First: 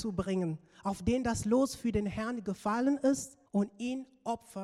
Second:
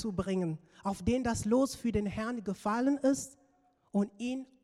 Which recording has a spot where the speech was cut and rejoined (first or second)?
first